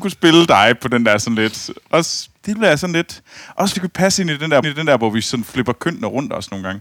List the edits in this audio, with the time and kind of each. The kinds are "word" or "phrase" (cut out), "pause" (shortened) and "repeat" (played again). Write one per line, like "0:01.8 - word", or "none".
0:02.4 - pause
0:03.7 - word
0:04.6 - repeat